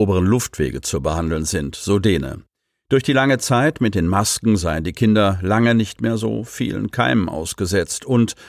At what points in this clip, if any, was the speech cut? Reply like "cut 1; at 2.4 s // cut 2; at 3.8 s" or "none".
none